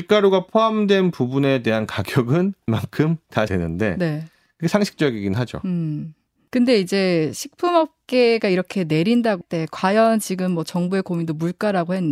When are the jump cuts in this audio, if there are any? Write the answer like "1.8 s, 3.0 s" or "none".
2.7 s, 3.5 s, 9.4 s